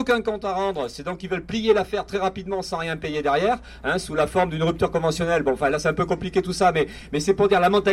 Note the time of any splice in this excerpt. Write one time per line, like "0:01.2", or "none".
none